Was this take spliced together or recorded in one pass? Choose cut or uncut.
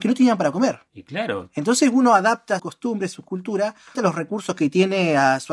cut